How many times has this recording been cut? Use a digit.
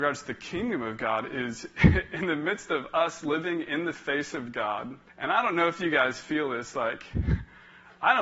1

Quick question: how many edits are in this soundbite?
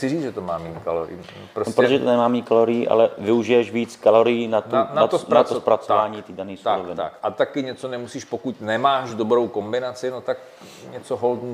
0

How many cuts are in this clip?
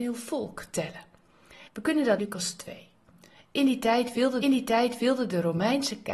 3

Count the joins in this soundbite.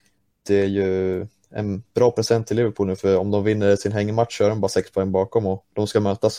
1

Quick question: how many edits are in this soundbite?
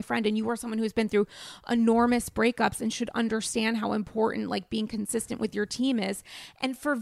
0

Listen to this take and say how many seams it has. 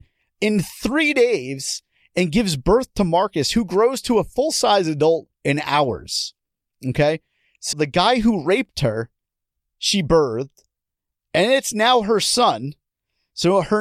1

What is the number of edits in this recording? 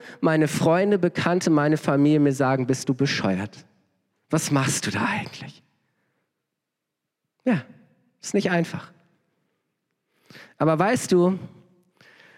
0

